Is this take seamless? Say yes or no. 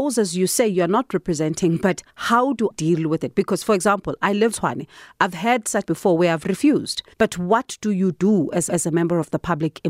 no